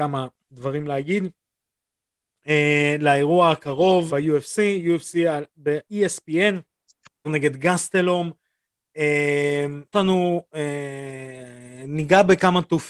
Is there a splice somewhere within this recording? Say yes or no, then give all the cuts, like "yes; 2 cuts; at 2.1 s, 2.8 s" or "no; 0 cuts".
yes; 4 cuts; at 4.1 s, 5.9 s, 7.2 s, 9.9 s